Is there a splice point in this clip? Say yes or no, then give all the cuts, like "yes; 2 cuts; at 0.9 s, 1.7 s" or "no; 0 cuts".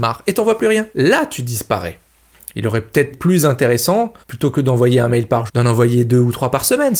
yes; 4 cuts; at 0.9 s, 3.1 s, 4.2 s, 5.5 s